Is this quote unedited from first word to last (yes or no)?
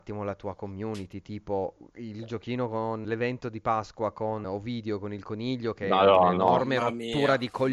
no